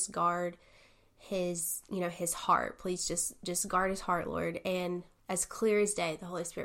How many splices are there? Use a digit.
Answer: 1